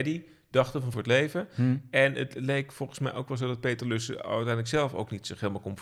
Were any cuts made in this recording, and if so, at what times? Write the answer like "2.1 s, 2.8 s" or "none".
0.9 s